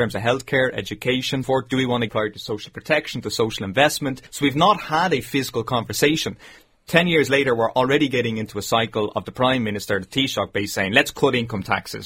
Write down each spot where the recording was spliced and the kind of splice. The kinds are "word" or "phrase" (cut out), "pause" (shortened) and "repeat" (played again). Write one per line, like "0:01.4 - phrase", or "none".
0:01.4 - word
0:02.1 - word
0:04.3 - pause